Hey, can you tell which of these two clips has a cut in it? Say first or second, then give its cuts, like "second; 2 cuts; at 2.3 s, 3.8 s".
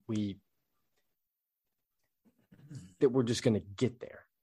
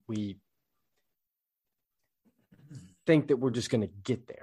first; 1 cut; at 3.0 s